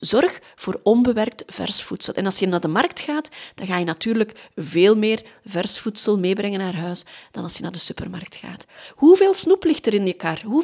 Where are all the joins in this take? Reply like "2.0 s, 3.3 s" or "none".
none